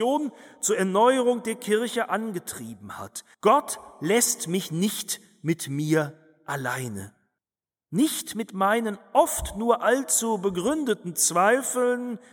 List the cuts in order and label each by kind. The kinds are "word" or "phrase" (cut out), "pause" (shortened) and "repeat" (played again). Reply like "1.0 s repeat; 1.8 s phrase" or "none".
3.3 s pause; 7.4 s pause